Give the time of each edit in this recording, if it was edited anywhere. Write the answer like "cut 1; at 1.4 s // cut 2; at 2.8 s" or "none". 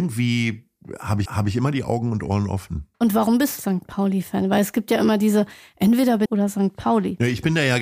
cut 1; at 1.3 s // cut 2; at 2.9 s // cut 3; at 3.6 s // cut 4; at 6.3 s